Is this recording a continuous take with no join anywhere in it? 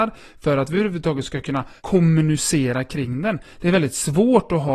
no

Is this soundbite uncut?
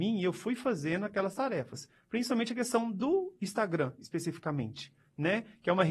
yes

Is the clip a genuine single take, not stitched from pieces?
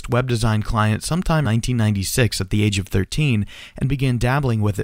no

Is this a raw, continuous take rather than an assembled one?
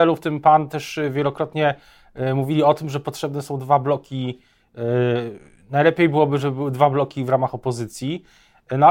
yes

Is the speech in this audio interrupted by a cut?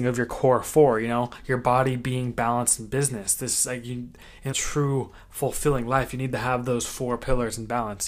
yes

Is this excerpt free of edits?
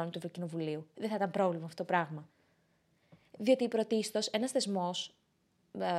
yes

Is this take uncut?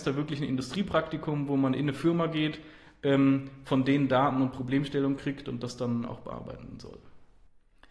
yes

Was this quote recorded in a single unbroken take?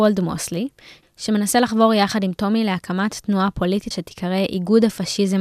no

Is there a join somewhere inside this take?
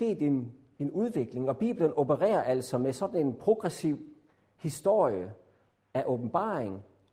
no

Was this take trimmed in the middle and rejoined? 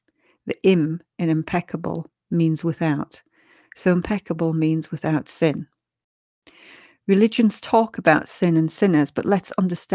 no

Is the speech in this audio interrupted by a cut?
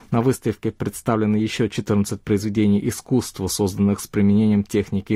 no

